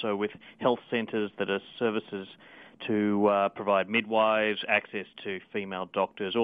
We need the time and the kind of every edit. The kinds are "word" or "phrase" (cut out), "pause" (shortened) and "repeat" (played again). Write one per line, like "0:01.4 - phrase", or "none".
none